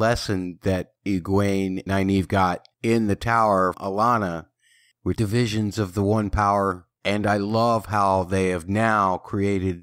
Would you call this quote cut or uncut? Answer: cut